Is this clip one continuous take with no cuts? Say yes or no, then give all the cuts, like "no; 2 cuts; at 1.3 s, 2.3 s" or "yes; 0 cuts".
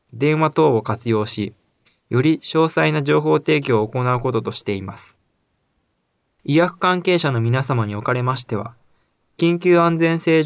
yes; 0 cuts